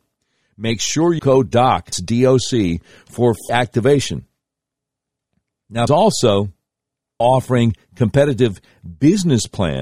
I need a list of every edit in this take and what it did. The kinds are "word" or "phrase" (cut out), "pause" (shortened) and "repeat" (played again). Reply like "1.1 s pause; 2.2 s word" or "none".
1.2 s phrase; 1.9 s word; 3.5 s word; 5.9 s phrase; 7.2 s word